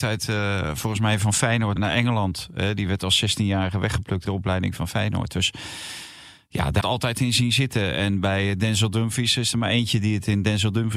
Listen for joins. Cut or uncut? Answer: cut